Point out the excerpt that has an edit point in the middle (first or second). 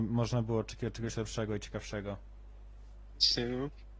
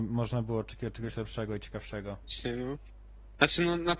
second